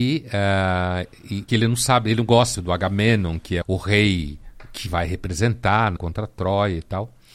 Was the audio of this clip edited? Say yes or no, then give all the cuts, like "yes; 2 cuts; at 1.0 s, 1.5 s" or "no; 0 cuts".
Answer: yes; 5 cuts; at 1.5 s, 2.5 s, 3.6 s, 4.9 s, 6.0 s